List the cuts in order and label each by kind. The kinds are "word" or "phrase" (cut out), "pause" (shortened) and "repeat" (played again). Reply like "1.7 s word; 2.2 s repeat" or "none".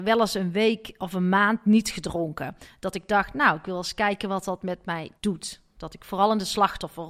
5.2 s pause